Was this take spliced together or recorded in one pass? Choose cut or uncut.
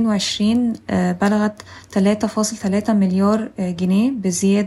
uncut